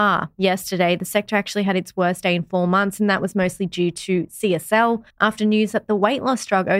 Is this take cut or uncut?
cut